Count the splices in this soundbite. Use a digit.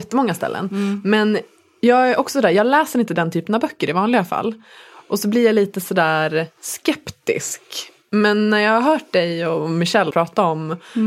1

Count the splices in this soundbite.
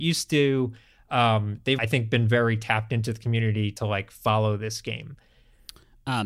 1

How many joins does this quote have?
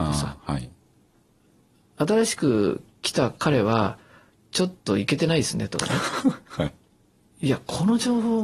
0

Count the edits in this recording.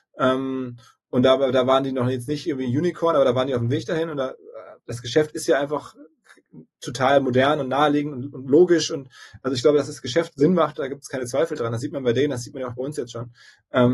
2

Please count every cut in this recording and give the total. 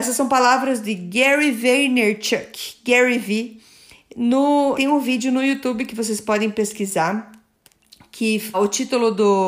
2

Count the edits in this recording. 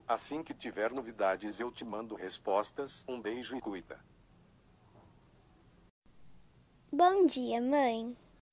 1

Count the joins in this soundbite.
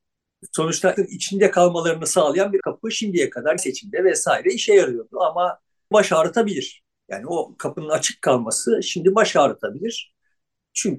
4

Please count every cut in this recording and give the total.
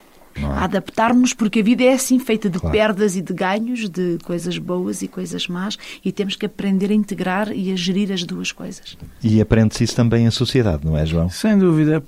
0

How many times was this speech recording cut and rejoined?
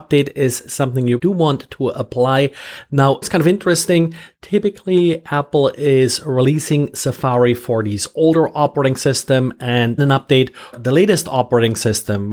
4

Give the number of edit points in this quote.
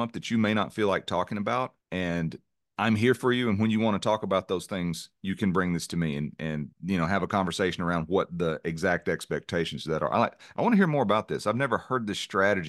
2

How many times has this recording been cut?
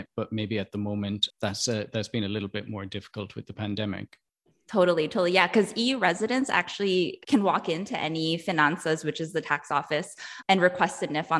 3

